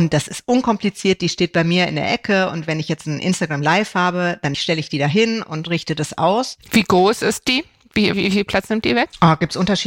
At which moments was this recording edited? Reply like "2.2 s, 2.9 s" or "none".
8.1 s